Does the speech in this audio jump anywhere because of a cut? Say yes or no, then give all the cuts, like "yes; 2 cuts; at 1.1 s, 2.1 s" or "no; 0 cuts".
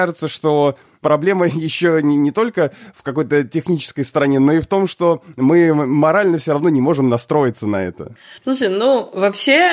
yes; 1 cut; at 8.4 s